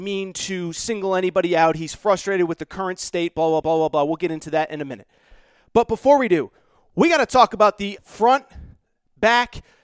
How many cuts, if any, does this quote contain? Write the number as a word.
two